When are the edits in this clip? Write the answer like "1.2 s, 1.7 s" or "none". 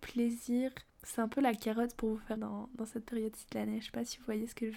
2.4 s